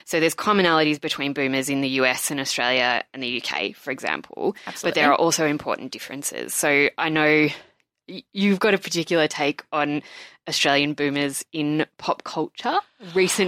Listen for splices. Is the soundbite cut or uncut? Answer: uncut